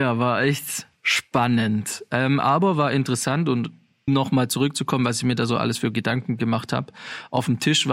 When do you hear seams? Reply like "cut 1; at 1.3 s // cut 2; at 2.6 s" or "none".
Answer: cut 1; at 4.1 s